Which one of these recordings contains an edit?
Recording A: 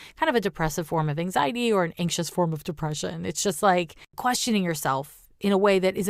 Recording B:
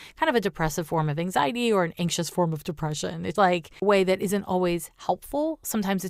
B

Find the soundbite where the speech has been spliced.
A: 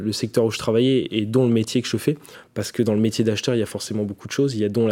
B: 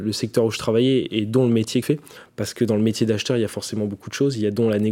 B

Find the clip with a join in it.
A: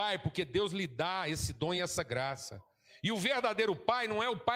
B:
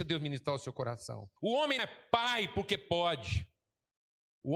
B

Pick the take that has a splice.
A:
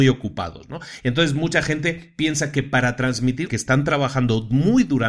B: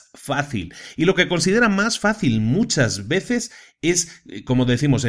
A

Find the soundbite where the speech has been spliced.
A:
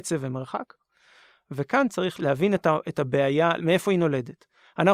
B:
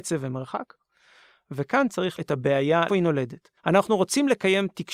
B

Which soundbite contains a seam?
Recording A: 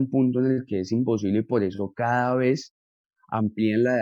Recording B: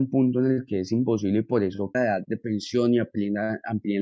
B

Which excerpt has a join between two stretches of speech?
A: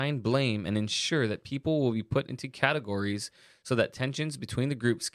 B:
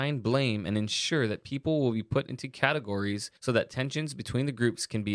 B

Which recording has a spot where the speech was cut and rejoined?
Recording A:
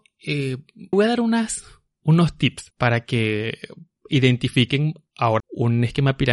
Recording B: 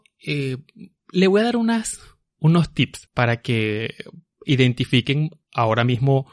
A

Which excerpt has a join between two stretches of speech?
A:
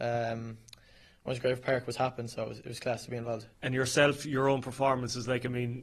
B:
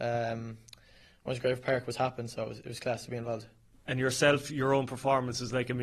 A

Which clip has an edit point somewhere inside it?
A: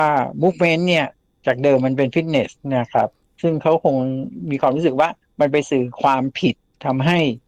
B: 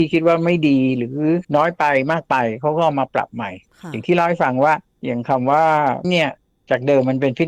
B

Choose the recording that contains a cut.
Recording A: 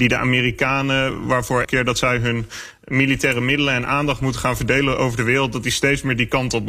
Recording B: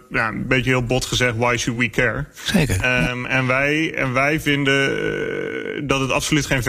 A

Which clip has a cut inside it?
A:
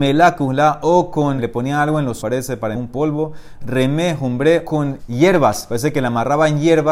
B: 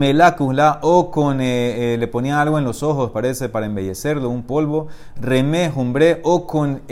A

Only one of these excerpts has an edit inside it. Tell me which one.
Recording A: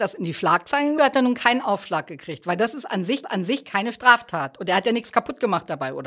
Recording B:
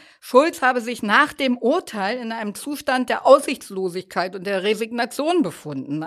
A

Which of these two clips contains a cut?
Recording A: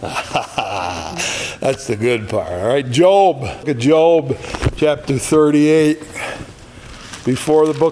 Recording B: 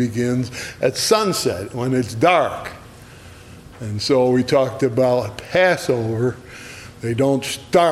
A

